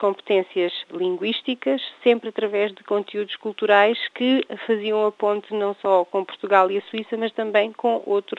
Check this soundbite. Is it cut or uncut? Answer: uncut